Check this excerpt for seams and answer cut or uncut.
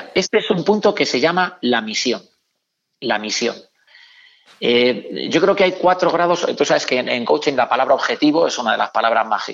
uncut